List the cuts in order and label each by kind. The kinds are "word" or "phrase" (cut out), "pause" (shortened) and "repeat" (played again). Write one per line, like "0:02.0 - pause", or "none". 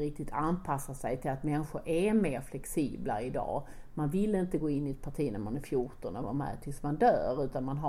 none